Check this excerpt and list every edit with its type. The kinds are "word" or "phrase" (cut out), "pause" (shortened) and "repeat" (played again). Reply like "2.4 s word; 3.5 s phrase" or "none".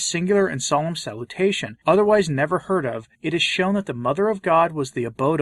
1.8 s pause; 3.1 s pause